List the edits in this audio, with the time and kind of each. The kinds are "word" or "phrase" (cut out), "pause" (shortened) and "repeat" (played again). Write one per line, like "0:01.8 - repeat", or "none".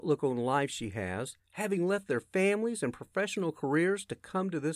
0:01.4 - pause